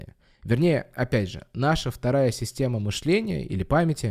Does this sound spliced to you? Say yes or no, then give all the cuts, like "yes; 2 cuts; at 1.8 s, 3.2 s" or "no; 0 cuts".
no; 0 cuts